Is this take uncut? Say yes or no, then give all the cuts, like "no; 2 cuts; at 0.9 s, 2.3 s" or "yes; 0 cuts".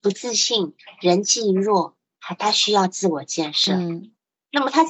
yes; 0 cuts